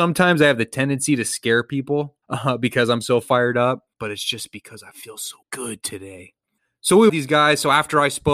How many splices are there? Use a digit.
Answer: 5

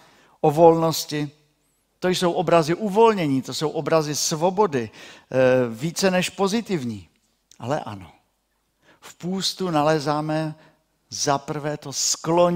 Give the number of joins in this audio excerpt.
1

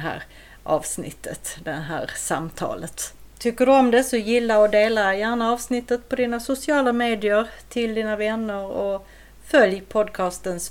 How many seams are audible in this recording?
0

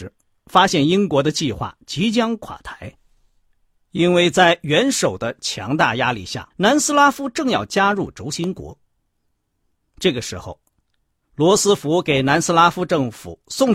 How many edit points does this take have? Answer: 1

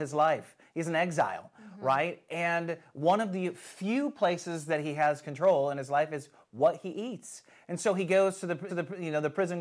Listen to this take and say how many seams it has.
1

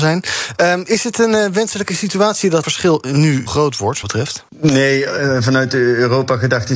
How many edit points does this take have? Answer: 4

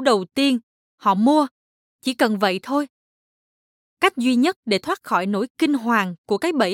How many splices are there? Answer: 0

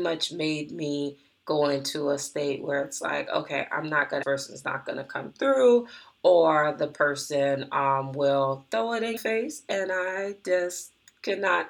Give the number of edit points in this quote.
2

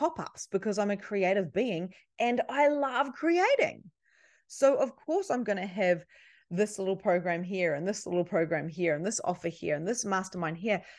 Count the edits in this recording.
0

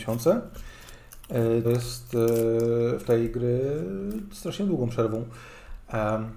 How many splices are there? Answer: 2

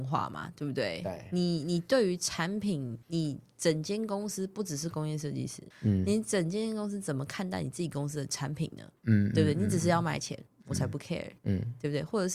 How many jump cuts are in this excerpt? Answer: 4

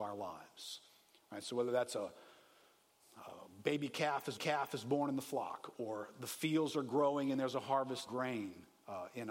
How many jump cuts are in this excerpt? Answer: 2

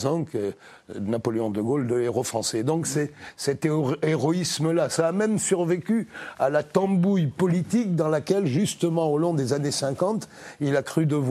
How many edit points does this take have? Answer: 0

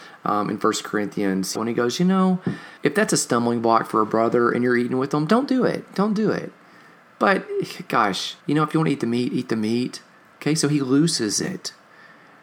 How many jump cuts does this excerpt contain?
3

